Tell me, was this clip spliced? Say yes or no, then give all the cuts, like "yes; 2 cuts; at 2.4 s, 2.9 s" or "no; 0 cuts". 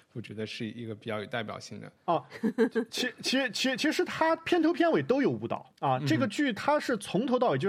yes; 2 cuts; at 2.0 s, 5.8 s